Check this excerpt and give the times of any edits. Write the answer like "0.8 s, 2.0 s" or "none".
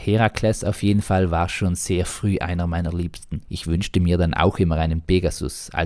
3.4 s

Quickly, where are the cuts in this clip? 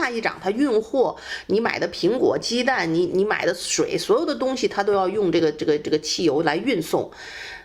none

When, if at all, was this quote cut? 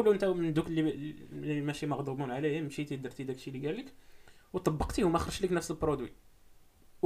none

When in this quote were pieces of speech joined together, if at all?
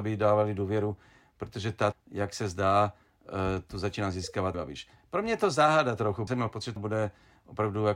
1.9 s, 4.5 s, 6.3 s, 6.8 s

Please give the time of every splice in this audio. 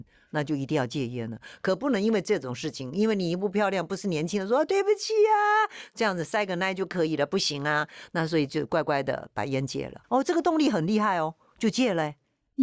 10.0 s

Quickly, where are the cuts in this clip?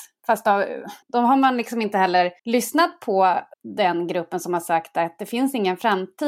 1.0 s, 2.4 s, 3.5 s

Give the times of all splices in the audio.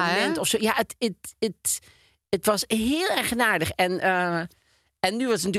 none

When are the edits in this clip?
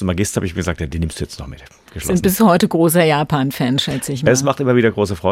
none

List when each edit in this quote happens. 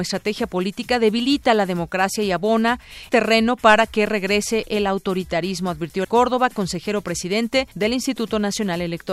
3.1 s, 6.0 s, 7.7 s

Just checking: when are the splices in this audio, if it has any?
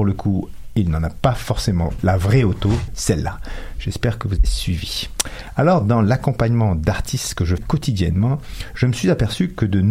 2.0 s, 2.9 s, 4.4 s, 7.6 s

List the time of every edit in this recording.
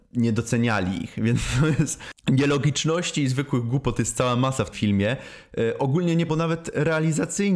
4.7 s, 6.3 s

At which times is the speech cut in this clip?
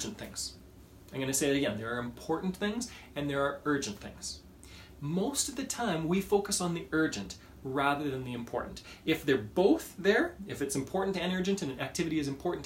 none

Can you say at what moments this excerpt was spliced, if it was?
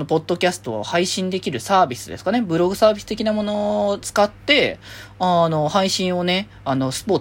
4.0 s

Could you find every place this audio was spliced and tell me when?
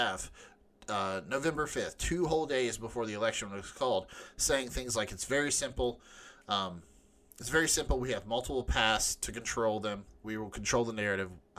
none

